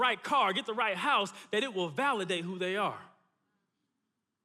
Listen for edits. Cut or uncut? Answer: uncut